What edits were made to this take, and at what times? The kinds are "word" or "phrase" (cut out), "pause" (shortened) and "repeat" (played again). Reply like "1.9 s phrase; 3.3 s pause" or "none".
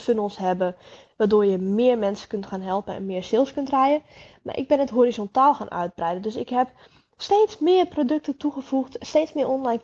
none